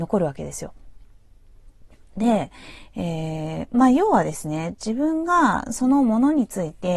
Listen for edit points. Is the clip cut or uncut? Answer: cut